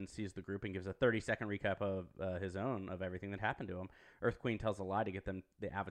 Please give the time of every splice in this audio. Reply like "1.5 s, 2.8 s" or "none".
none

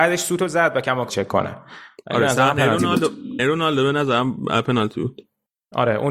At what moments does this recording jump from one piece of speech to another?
1.1 s, 3.4 s

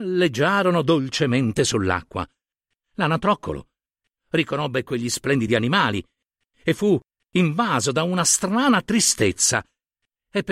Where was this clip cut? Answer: none

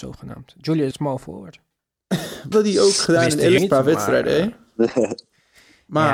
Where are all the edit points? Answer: 0.9 s, 2.5 s, 3.6 s

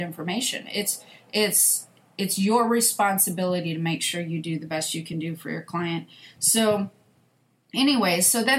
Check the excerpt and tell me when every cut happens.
none

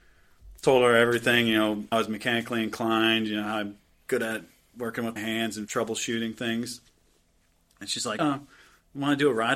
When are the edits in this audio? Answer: 1.9 s, 5.2 s, 8.2 s

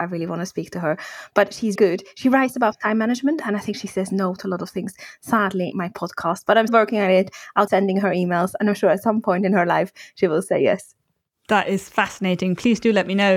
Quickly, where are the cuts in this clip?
1.7 s, 5.7 s, 6.7 s, 7.7 s

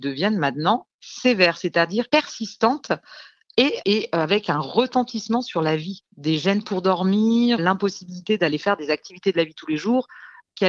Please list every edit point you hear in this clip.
2.1 s, 7.6 s

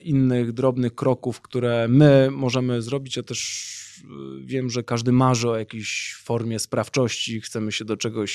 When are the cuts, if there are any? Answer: 4.8 s

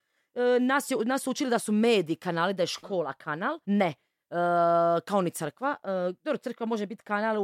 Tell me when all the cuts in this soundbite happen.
3.6 s

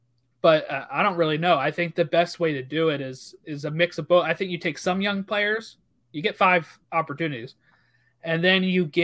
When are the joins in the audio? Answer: 6.8 s

